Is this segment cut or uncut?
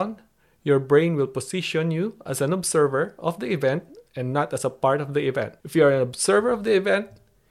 cut